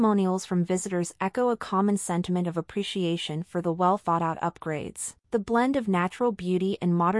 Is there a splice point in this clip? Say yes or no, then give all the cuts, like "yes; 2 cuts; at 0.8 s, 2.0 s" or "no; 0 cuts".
yes; 1 cut; at 5.2 s